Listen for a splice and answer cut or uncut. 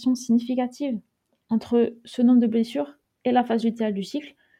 uncut